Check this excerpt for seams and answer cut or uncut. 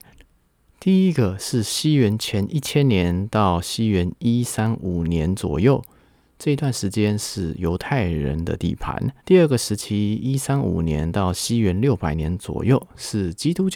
cut